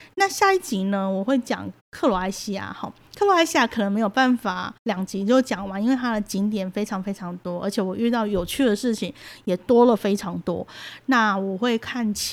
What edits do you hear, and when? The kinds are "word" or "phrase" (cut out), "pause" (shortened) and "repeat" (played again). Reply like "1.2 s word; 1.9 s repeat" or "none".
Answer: 1.8 s pause; 4.8 s pause